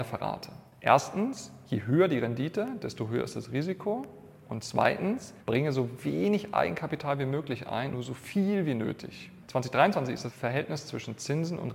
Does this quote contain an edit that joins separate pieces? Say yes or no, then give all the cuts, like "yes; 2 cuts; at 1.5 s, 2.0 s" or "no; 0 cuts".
yes; 1 cut; at 7.9 s